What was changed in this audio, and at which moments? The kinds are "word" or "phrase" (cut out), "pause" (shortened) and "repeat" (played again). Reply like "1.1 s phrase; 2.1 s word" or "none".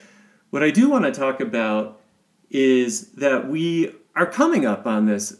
none